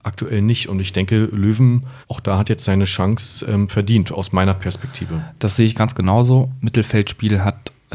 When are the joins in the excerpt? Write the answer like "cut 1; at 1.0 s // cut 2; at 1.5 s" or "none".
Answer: cut 1; at 2.0 s